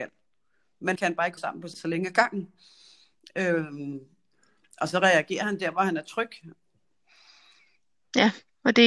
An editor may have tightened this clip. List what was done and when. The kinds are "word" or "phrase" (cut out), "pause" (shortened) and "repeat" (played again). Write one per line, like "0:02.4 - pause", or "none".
0:00.9 - word
0:01.4 - word
0:01.7 - word